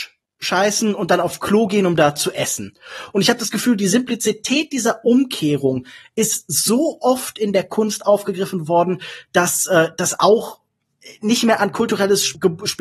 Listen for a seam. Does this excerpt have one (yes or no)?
no